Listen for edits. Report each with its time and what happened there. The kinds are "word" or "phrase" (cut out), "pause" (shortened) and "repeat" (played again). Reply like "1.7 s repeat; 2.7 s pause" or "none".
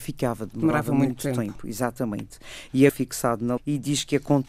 2.9 s phrase; 3.6 s word